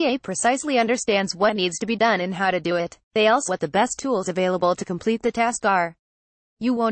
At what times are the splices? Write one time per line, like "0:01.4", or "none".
0:03.0
0:03.5